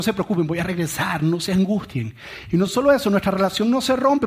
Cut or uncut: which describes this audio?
uncut